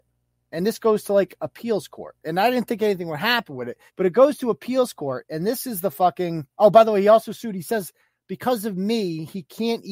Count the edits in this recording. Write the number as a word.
one